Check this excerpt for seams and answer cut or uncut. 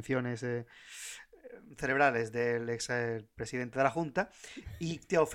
uncut